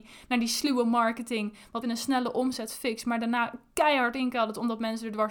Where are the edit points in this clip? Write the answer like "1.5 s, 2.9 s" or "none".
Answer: 1.8 s